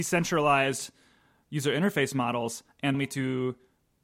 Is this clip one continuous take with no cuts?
no; 1 cut; at 2.9 s

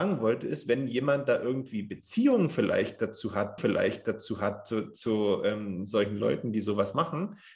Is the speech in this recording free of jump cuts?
no; 1 cut; at 3.6 s

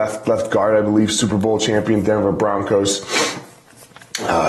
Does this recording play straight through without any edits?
yes; 0 cuts

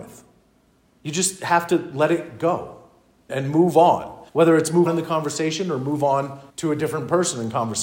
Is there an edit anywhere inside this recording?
yes; 4 cuts; at 3.3 s, 4.3 s, 4.9 s, 6.5 s

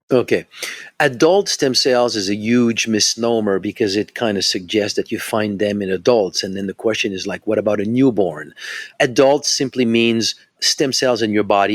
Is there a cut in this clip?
no; 0 cuts

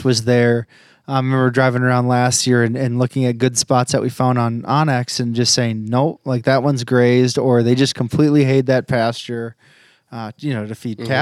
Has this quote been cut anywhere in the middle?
no; 0 cuts

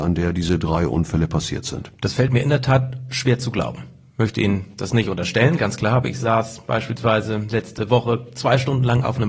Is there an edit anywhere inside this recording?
no; 0 cuts

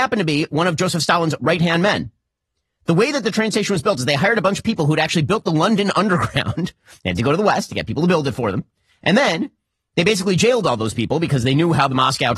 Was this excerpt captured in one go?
yes; 0 cuts

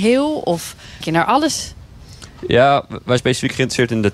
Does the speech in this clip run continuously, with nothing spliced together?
no; 2 cuts; at 1.0 s, 3.2 s

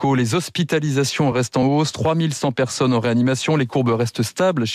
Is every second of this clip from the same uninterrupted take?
yes; 0 cuts

